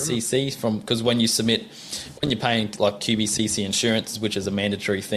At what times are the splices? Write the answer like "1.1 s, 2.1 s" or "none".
none